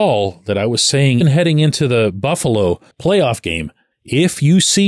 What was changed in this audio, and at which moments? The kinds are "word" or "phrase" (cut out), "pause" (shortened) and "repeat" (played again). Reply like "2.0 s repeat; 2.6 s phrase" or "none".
1.2 s word; 2.9 s pause; 3.9 s pause